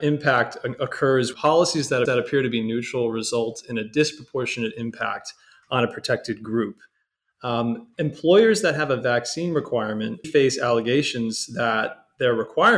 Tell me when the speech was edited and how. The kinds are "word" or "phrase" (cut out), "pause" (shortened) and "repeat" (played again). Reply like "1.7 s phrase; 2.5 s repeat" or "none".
1.3 s word; 2.1 s repeat; 10.2 s word

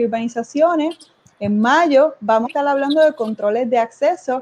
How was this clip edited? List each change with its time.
2.4 s word

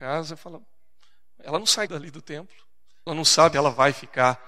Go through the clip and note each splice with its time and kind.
1.9 s word; 3.1 s word; 3.5 s word

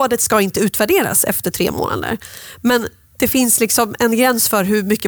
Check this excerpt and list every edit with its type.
none

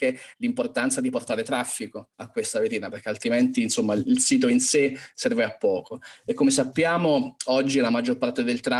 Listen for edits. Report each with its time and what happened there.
2.1 s pause

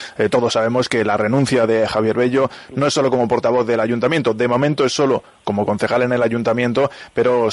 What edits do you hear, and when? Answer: none

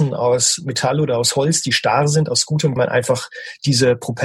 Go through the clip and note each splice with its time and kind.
2.8 s phrase

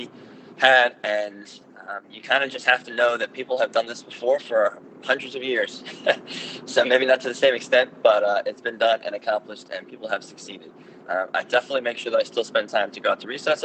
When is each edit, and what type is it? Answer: none

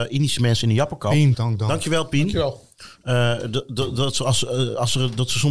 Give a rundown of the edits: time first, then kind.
1.3 s word

